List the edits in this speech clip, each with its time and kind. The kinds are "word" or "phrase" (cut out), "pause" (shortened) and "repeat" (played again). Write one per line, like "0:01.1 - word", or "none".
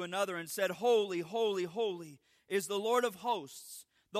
none